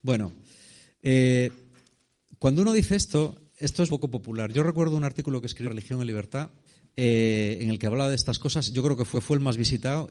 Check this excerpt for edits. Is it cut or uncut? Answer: cut